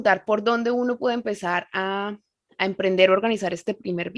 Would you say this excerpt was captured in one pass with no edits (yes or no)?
yes